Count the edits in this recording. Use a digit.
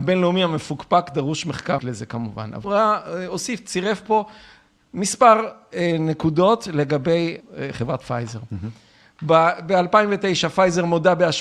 3